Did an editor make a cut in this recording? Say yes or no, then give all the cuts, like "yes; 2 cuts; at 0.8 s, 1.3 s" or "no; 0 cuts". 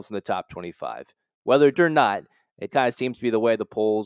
yes; 2 cuts; at 1.7 s, 2.7 s